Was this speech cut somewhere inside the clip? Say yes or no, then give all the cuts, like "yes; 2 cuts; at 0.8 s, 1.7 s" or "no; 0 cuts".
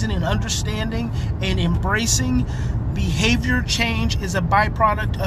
yes; 1 cut; at 2.9 s